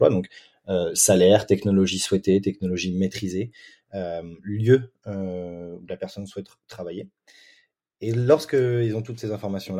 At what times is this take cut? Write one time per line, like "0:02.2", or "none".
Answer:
none